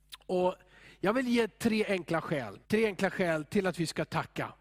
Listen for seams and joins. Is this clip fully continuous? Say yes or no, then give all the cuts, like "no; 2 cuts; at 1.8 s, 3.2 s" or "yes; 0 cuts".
no; 1 cut; at 2.6 s